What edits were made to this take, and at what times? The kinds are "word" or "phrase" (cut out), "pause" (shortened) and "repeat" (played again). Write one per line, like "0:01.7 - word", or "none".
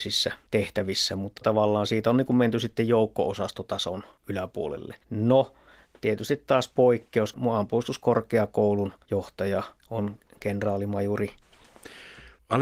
0:05.0 - pause
0:09.0 - pause